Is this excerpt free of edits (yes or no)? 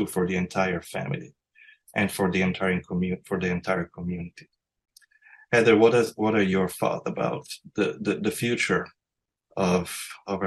yes